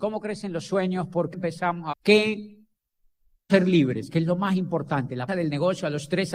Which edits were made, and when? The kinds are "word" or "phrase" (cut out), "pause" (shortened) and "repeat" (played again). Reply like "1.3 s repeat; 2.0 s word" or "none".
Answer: 1.3 s word; 1.9 s word; 3.5 s word; 5.3 s word